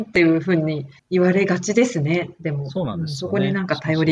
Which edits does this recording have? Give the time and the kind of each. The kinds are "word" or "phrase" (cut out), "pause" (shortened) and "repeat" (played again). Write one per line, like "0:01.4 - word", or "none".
0:01.0 - pause